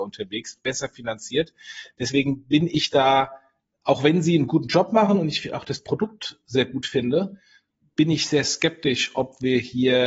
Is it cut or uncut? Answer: uncut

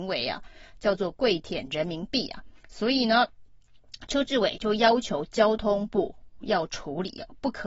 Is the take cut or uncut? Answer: cut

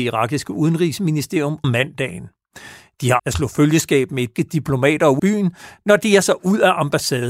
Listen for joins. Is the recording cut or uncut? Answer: cut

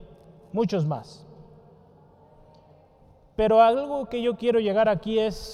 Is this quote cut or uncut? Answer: uncut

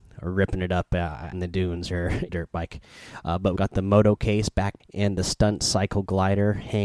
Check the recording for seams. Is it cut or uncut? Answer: cut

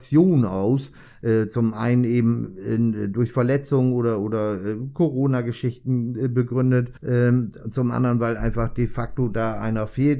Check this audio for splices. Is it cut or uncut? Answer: cut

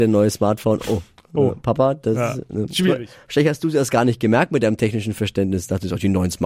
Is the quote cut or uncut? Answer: uncut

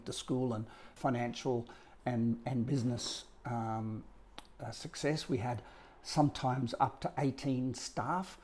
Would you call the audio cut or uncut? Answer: cut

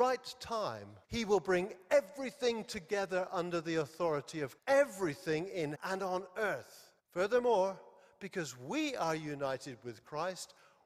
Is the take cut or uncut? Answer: cut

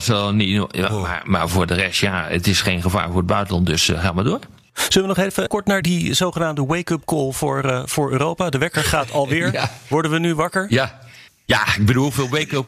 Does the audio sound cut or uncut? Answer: uncut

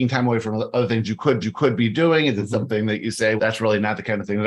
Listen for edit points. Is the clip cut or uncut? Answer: cut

